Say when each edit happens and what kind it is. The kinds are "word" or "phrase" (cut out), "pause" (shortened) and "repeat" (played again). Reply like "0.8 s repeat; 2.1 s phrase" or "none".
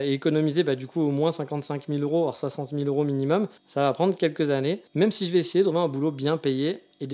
3.6 s pause; 4.9 s pause; 5.7 s word